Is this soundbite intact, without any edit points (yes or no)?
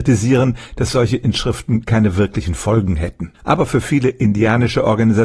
no